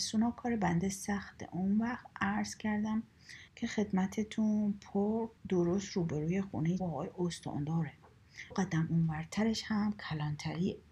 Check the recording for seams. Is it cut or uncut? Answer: cut